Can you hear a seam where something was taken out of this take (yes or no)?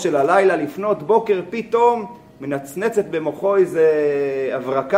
no